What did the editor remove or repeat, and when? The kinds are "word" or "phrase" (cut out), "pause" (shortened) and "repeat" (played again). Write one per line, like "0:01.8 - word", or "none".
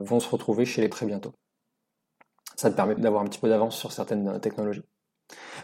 0:00.9 - word
0:03.0 - word